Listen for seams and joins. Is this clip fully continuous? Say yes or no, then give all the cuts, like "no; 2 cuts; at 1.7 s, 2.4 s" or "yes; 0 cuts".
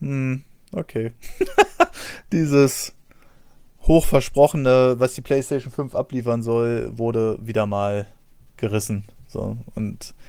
yes; 0 cuts